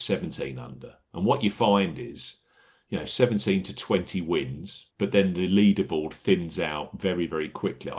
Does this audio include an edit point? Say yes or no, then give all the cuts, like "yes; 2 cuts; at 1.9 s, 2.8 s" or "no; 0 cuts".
yes; 1 cut; at 4.9 s